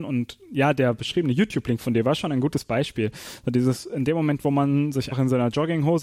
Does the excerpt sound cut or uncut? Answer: cut